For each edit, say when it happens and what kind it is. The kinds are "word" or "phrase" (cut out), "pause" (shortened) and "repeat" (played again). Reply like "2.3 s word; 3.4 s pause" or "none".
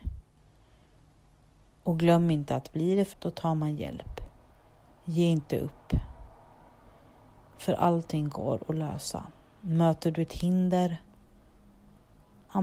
3.1 s word